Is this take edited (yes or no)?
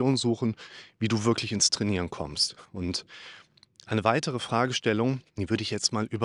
yes